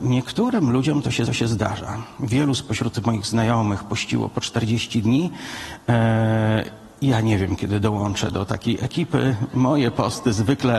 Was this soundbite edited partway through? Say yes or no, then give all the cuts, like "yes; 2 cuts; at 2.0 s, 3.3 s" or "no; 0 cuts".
yes; 1 cut; at 1.3 s